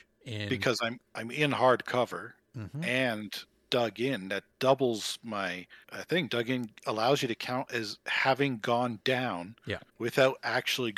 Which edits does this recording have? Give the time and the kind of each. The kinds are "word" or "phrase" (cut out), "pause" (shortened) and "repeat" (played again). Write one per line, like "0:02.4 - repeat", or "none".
0:01.1 - pause
0:05.8 - pause
0:09.9 - pause